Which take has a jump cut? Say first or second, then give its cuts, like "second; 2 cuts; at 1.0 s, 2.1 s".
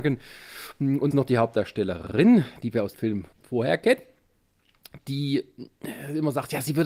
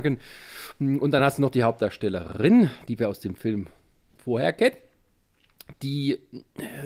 first; 3 cuts; at 1.1 s, 2.9 s, 3.3 s